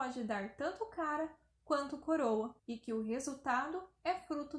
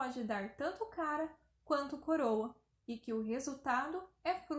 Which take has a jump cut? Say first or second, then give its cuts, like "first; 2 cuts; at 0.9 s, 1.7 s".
first; 1 cut; at 2.6 s